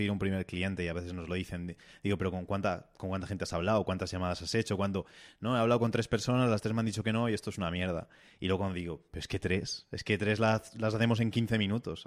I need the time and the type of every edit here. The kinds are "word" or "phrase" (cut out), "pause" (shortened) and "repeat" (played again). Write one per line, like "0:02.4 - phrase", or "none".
none

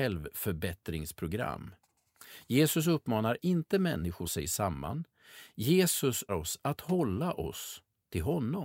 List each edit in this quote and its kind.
0:04.2 - phrase
0:06.3 - word

